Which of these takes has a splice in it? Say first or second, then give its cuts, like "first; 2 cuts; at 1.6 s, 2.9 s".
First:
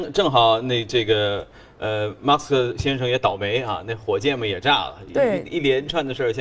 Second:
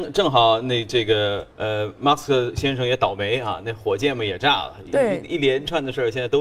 second; 1 cut; at 1.5 s